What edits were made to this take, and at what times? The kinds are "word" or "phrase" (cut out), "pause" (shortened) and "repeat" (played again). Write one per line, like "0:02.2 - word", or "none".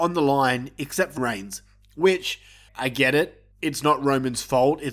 0:01.2 - word
0:02.7 - word
0:03.5 - pause